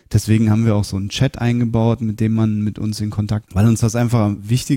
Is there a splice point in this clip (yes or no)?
yes